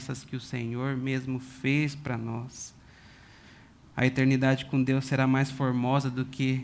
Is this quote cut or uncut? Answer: cut